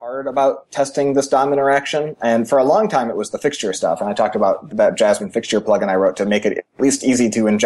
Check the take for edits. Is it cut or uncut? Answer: cut